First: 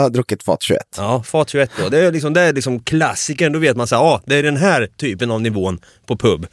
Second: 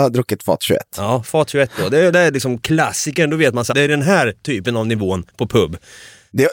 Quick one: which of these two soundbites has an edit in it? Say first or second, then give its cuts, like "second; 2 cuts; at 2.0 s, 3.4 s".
second; 3 cuts; at 2.1 s, 3.7 s, 5.3 s